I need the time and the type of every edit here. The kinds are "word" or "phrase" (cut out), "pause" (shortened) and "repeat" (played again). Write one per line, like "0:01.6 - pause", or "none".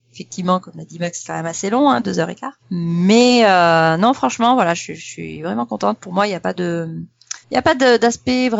0:01.2 - word
0:02.6 - pause
0:07.4 - pause